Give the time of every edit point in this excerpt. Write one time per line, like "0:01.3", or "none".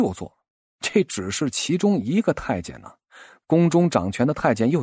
none